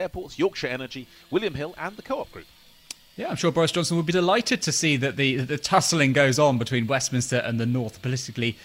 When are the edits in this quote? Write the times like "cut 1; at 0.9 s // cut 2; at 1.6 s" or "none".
none